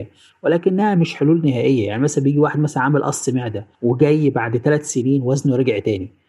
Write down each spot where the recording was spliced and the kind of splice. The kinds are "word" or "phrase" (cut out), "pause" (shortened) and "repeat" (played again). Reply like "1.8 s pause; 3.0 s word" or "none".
3.7 s pause